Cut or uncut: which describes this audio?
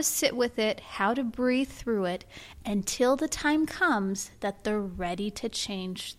uncut